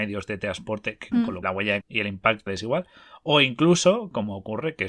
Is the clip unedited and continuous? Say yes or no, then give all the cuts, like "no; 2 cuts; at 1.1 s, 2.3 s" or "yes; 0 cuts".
no; 4 cuts; at 1.1 s, 1.4 s, 1.8 s, 2.5 s